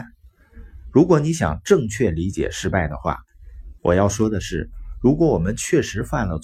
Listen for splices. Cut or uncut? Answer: cut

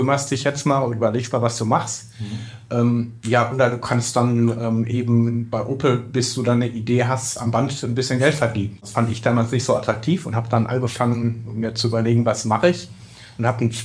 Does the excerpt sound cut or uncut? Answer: uncut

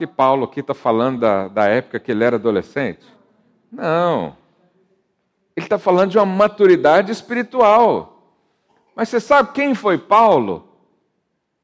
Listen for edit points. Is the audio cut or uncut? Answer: uncut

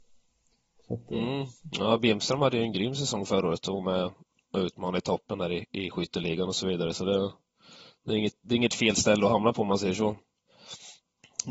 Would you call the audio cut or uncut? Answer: uncut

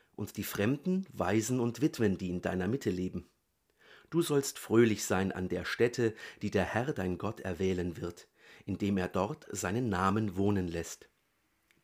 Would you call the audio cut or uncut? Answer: uncut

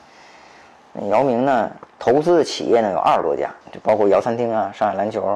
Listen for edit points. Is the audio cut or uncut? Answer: cut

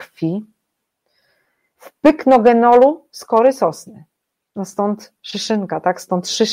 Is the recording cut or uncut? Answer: uncut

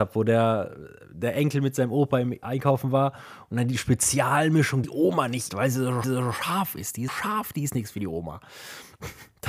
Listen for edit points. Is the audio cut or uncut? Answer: cut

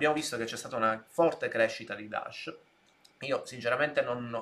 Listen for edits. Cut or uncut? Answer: uncut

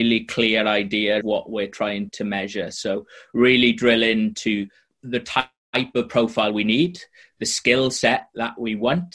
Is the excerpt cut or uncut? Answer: cut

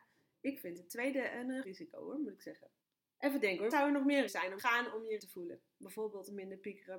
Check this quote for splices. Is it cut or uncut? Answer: cut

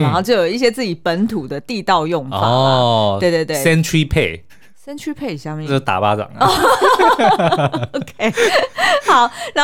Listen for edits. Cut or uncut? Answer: cut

